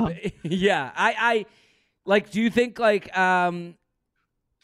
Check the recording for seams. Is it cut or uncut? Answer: uncut